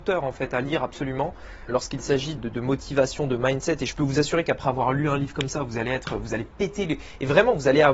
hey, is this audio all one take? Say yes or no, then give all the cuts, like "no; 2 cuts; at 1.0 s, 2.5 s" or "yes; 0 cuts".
no; 2 cuts; at 1.7 s, 2.4 s